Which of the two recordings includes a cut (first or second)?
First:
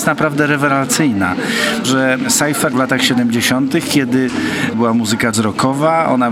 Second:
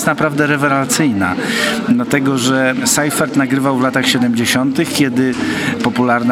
first